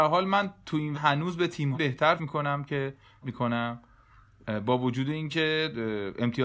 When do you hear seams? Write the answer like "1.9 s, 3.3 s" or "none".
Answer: 0.9 s, 1.7 s, 2.2 s, 3.2 s